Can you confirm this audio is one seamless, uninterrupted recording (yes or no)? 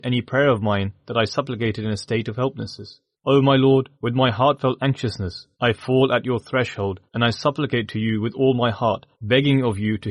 no